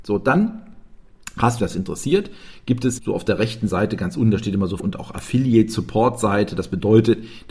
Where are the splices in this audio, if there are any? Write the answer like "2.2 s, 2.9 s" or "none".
1.6 s, 3.0 s, 4.8 s